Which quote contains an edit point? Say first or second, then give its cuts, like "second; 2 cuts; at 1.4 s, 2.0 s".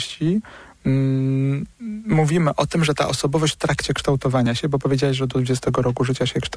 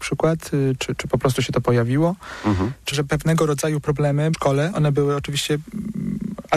second; 2 cuts; at 2.9 s, 4.3 s